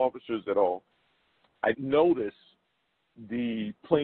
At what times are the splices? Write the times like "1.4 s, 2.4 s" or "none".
1.7 s